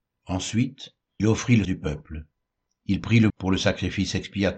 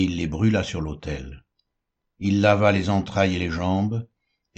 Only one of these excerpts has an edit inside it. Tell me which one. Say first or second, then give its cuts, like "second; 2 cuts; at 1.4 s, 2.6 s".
first; 3 cuts; at 1.2 s, 1.6 s, 3.3 s